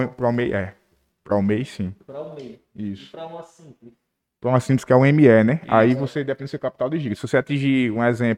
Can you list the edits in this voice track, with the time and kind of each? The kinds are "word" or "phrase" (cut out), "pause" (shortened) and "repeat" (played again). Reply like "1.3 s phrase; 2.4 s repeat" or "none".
none